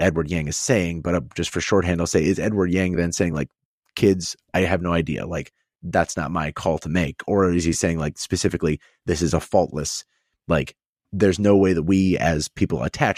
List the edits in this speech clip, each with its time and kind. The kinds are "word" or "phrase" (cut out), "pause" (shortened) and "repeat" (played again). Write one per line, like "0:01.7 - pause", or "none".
none